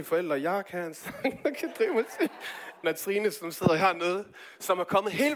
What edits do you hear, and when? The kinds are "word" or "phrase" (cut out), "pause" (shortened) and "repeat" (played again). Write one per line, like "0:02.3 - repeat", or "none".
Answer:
0:02.8 - word